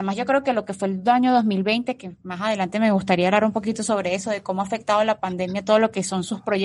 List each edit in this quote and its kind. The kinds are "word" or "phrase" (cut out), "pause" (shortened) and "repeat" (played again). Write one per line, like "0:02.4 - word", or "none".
none